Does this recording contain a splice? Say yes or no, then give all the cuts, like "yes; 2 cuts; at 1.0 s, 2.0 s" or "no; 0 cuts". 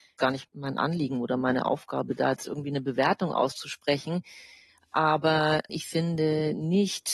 no; 0 cuts